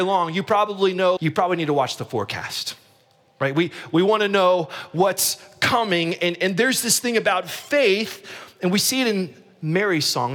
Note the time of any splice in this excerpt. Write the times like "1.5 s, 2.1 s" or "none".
1.2 s